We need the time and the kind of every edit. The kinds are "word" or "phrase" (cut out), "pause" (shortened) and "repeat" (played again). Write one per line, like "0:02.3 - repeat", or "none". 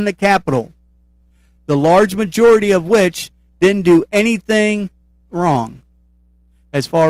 none